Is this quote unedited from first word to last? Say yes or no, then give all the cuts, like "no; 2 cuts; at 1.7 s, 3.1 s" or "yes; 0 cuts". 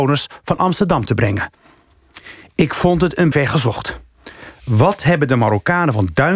no; 1 cut; at 3.3 s